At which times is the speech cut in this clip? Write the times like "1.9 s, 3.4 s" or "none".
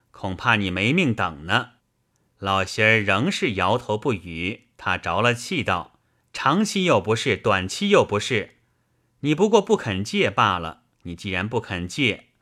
1.8 s, 4.7 s, 6.0 s, 10.9 s